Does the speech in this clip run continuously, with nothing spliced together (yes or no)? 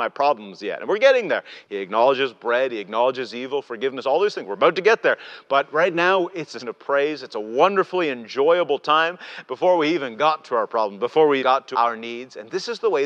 no